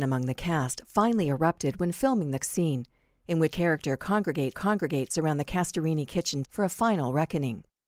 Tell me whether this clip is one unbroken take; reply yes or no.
no